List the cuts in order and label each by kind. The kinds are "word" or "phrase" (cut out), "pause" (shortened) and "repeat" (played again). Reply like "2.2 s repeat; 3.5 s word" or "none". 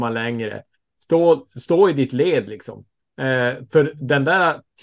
none